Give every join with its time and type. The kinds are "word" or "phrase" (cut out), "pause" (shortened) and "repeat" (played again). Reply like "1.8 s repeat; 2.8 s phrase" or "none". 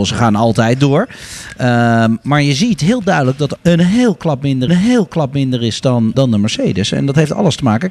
3.6 s phrase; 4.7 s repeat; 6.1 s word